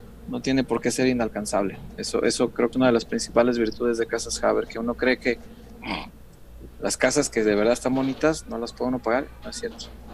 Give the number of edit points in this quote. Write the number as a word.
one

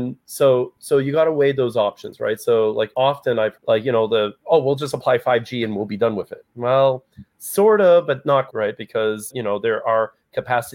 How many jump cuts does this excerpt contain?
four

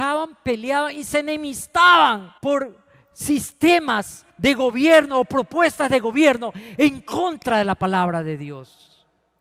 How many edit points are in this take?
two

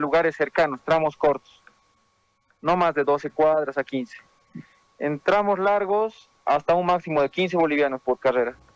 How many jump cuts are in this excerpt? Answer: zero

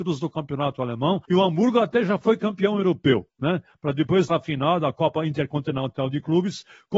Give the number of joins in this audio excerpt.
three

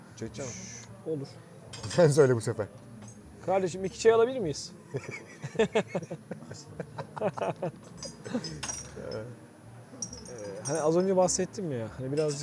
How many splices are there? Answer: zero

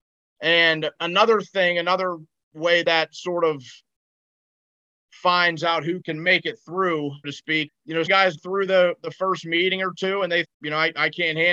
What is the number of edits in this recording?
eight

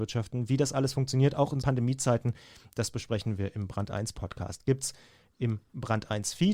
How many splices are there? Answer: one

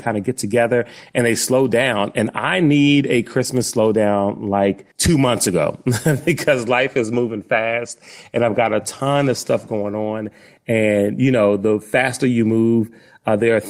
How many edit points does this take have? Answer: one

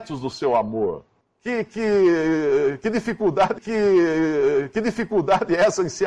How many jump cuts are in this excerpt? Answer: one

